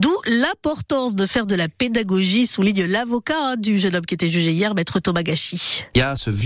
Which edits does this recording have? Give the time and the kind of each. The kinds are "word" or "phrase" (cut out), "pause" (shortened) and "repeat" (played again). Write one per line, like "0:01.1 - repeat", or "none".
none